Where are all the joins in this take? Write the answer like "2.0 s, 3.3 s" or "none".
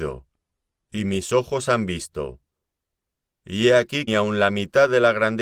4.1 s